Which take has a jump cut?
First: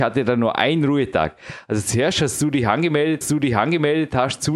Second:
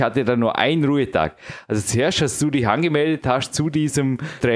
first; 1 cut; at 3.2 s

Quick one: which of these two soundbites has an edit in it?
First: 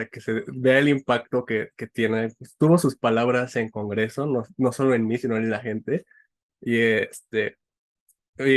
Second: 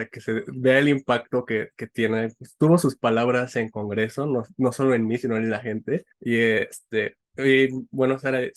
second; 2 cuts; at 6.1 s, 7.2 s

